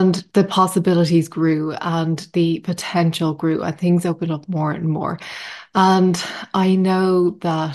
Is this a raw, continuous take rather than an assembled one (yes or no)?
yes